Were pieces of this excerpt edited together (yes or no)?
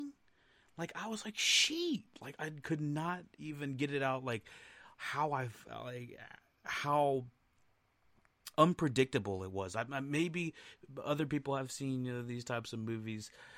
no